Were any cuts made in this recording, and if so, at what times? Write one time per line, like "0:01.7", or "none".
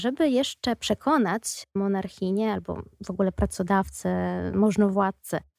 0:02.9

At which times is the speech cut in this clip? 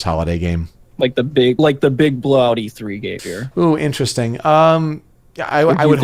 0:01.6
0:03.2

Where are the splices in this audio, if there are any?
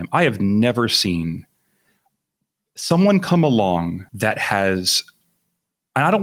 0:04.1

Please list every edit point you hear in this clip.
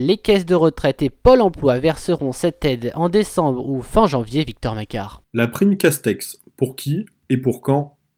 none

